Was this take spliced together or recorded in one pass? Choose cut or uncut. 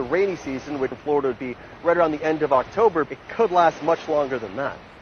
cut